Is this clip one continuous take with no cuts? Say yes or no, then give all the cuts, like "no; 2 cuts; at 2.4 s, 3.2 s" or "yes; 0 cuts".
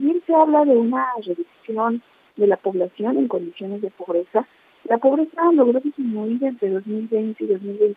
yes; 0 cuts